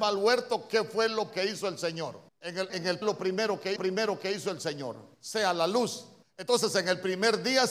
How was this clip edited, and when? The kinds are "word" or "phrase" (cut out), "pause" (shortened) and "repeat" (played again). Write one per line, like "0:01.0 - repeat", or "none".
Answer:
0:01.3 - word
0:02.3 - pause
0:02.7 - word
0:03.0 - phrase
0:03.8 - repeat
0:05.1 - pause
0:06.2 - pause